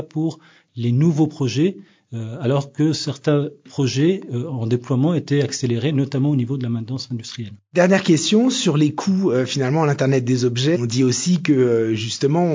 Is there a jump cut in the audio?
no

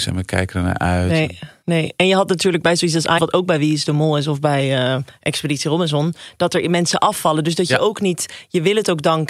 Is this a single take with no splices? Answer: no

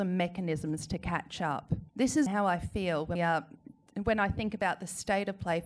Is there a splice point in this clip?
yes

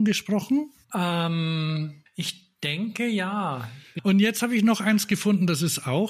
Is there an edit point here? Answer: no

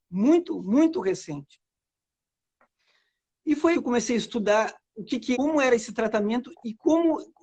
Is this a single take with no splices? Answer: no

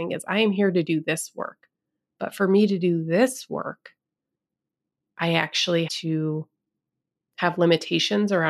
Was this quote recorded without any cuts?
no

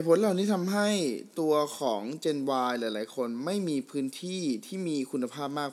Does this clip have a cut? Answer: no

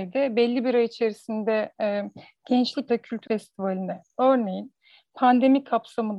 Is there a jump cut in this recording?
yes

